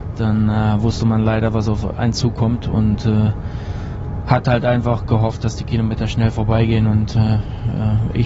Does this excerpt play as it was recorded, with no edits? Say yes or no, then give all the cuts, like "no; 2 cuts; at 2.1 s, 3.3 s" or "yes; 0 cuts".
yes; 0 cuts